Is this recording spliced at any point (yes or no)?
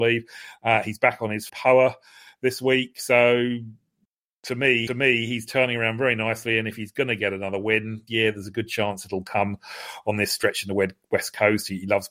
yes